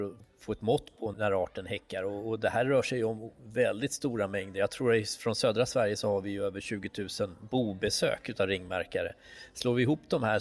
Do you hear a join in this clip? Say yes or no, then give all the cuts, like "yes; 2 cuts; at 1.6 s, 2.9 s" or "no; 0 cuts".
yes; 1 cut; at 1.1 s